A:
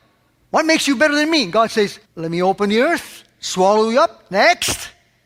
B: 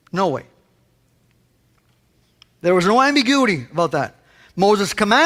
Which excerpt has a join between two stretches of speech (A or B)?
A